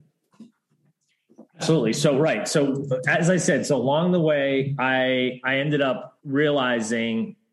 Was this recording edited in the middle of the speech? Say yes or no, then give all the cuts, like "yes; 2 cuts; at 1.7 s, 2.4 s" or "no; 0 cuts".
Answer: yes; 2 cuts; at 1.5 s, 6.2 s